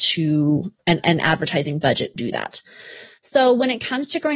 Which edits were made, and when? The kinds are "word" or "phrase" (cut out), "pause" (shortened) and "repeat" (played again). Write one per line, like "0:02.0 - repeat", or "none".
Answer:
0:02.2 - word

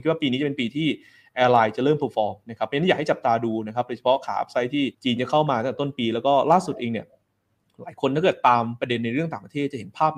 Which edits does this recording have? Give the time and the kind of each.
0:04.9 - pause

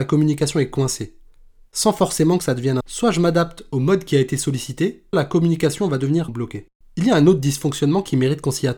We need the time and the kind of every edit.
0:02.8 - phrase
0:05.1 - word
0:06.3 - word

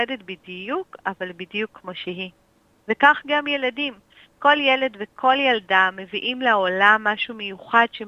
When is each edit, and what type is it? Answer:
none

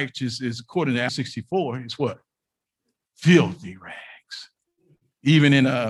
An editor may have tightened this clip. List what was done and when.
0:01.1 - word

